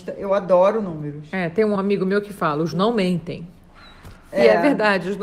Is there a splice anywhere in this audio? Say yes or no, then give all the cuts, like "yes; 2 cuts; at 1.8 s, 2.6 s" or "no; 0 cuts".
yes; 2 cuts; at 1.8 s, 2.7 s